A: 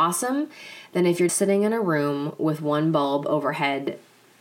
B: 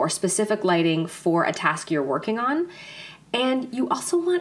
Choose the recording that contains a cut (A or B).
A